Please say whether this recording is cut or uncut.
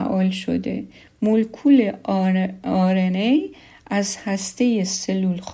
uncut